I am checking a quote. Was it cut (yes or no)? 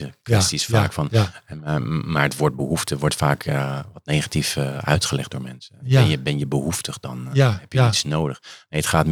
no